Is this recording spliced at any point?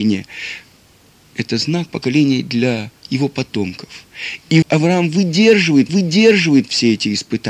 yes; 4 cuts; at 1.9 s, 3.0 s, 4.6 s, 5.9 s

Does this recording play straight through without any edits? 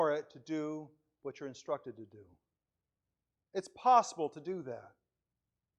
yes; 0 cuts

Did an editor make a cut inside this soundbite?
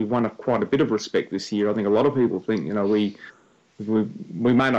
no; 0 cuts

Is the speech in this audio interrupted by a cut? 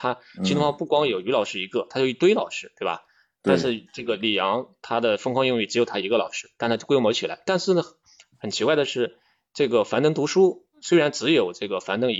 no; 0 cuts

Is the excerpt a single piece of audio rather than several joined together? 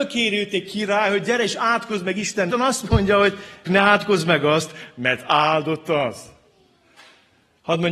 no; 2 cuts; at 2.5 s, 3.6 s

